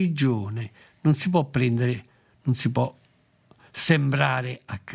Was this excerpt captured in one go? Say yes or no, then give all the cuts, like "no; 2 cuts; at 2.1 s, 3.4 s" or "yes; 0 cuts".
yes; 0 cuts